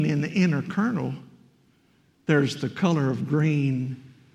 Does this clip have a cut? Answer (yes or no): no